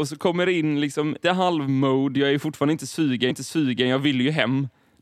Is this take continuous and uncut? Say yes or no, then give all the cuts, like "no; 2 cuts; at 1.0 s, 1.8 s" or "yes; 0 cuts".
no; 2 cuts; at 1.2 s, 3.3 s